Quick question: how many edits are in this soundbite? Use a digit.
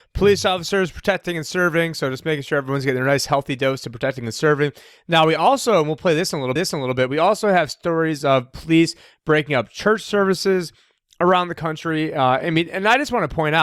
1